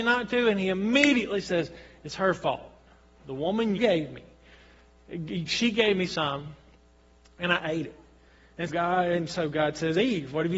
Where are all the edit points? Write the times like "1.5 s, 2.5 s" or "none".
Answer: 3.8 s, 8.7 s